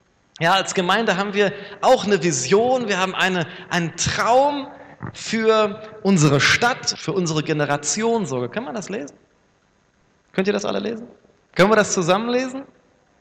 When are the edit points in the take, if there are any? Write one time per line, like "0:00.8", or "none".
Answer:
0:07.0